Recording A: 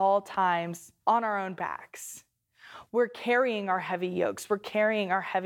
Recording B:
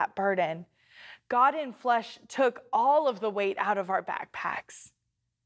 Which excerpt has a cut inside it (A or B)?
A